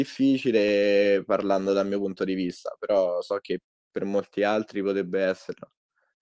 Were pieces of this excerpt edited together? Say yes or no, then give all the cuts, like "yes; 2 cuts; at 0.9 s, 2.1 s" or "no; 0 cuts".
no; 0 cuts